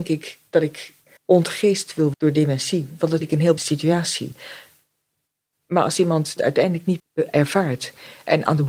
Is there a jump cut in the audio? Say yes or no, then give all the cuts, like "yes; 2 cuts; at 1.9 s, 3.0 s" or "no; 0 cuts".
yes; 6 cuts; at 1.2 s, 2.1 s, 3.2 s, 3.6 s, 6.4 s, 7.0 s